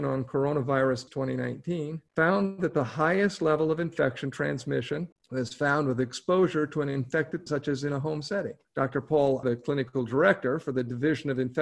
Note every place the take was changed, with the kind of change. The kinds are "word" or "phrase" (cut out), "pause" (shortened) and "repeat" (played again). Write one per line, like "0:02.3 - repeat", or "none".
0:01.1 - word
0:02.1 - pause
0:05.1 - pause
0:07.5 - word
0:08.6 - pause
0:09.4 - word